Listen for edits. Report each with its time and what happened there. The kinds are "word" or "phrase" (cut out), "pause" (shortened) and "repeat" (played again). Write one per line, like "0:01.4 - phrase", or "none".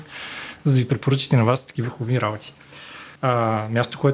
0:03.2 - pause